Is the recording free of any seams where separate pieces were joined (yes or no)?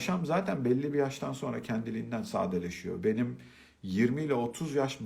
yes